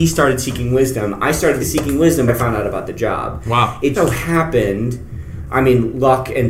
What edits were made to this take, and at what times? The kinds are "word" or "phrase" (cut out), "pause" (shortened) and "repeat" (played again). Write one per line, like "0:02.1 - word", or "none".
0:01.6 - word
0:02.3 - word
0:03.9 - word